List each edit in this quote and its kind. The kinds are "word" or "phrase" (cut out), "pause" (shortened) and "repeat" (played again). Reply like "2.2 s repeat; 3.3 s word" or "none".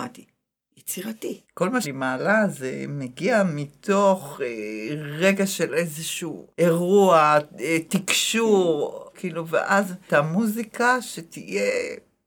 1.4 s pause; 1.8 s word; 6.5 s pause; 9.1 s word; 10.1 s phrase